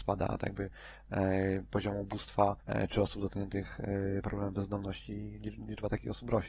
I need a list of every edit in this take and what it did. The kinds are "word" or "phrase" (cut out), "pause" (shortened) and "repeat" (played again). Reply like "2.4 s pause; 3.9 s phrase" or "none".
2.6 s pause

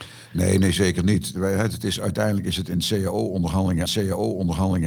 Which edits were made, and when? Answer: 3.9 s repeat

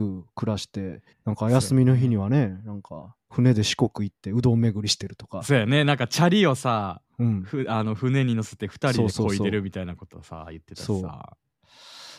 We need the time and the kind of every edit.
1.1 s pause

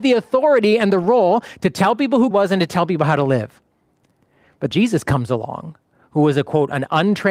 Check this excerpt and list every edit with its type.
2.3 s word; 4.7 s word

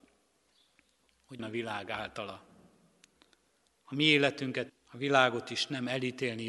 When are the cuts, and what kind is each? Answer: 1.4 s word; 4.7 s word

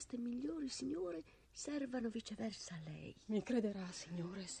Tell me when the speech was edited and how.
1.4 s pause

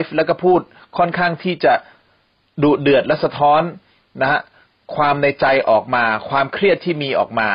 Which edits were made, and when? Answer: none

